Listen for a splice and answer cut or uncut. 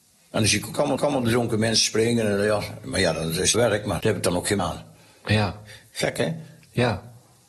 cut